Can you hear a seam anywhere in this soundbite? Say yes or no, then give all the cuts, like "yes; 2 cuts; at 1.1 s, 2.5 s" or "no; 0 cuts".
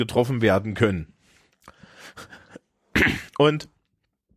yes; 1 cut; at 3.3 s